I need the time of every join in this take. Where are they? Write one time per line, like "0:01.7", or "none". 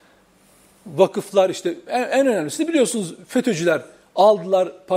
none